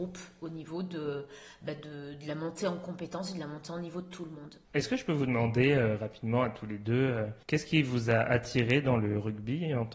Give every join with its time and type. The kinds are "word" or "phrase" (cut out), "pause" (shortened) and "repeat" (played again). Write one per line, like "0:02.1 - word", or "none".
0:04.6 - pause
0:07.4 - pause